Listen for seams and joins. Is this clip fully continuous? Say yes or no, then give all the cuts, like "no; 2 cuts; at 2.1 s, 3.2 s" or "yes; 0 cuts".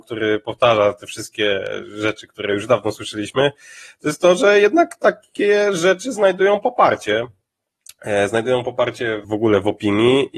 no; 1 cut; at 9.2 s